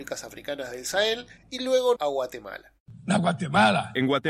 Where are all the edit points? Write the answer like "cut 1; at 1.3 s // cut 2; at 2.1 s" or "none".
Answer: cut 1; at 1.4 s // cut 2; at 2.0 s